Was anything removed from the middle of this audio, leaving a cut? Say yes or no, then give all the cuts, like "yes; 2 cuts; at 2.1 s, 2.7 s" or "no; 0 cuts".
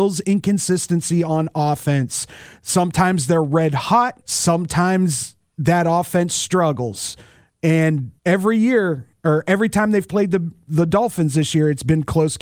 yes; 2 cuts; at 4.2 s, 8.2 s